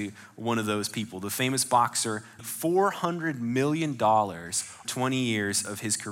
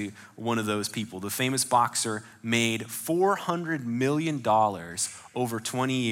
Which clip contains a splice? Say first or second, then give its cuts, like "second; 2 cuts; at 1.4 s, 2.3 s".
first; 2 cuts; at 2.4 s, 4.8 s